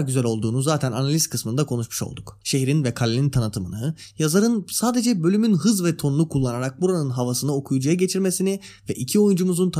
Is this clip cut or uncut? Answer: cut